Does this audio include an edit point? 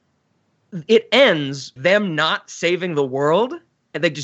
yes; 1 cut; at 1.8 s

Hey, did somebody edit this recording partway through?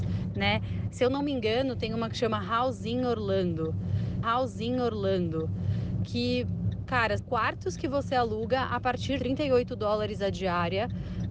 yes; 3 cuts; at 4.2 s, 7.2 s, 9.2 s

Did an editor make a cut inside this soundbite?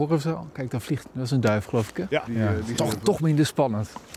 yes; 2 cuts; at 2.3 s, 2.8 s

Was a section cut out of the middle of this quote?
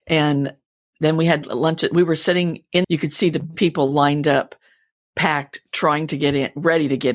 yes; 1 cut; at 2.8 s

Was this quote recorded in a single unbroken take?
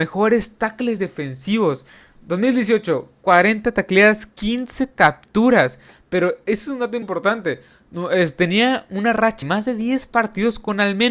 no; 2 cuts; at 7.0 s, 9.4 s

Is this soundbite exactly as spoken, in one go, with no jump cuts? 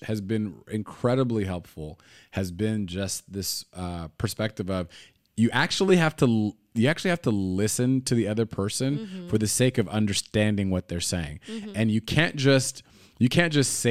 yes; 0 cuts

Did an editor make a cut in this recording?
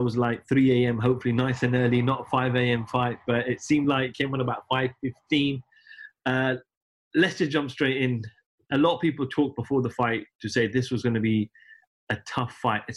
no; 0 cuts

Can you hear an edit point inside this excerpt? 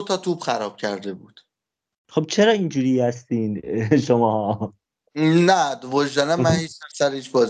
no; 0 cuts

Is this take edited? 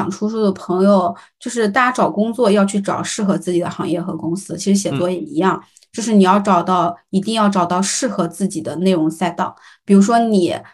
no; 0 cuts

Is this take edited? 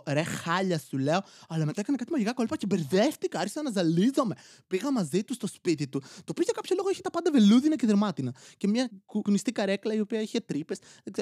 no; 0 cuts

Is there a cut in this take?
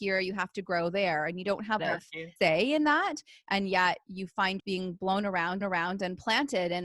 yes; 4 cuts; at 1.8 s, 2.4 s, 4.6 s, 5.6 s

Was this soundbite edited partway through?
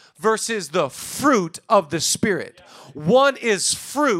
no; 0 cuts

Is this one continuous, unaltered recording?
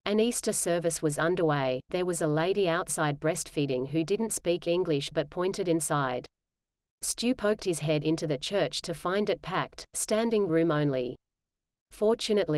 yes; 0 cuts

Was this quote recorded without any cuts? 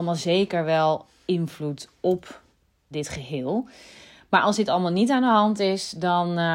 no; 1 cut; at 2.9 s

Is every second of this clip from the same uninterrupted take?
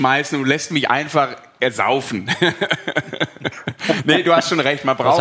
yes; 0 cuts

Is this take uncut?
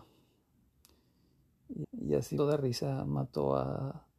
no; 2 cuts; at 1.8 s, 2.4 s

